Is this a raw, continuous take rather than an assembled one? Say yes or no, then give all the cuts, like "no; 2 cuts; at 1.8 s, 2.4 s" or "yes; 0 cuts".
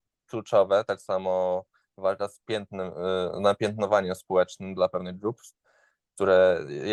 yes; 0 cuts